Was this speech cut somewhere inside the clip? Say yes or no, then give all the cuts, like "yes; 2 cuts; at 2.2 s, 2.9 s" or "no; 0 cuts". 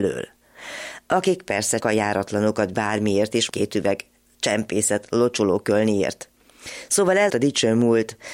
yes; 4 cuts; at 1.8 s, 2.7 s, 3.5 s, 7.3 s